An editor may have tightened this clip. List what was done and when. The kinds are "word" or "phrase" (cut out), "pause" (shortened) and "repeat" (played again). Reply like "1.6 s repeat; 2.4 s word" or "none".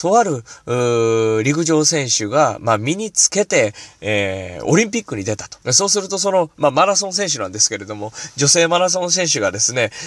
5.6 s pause